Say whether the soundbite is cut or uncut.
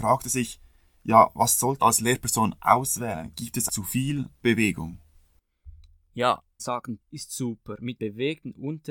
cut